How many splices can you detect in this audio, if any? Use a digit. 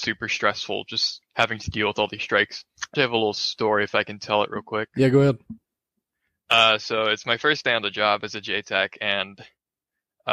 2